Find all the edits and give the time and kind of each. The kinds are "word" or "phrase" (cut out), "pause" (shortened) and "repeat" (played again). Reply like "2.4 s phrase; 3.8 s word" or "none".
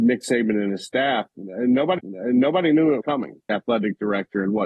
2.0 s repeat; 3.0 s word; 3.5 s phrase